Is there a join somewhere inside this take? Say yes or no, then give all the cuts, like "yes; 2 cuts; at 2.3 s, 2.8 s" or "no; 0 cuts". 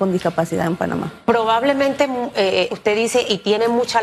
yes; 1 cut; at 2.7 s